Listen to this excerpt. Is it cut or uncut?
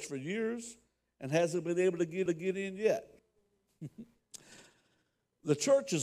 cut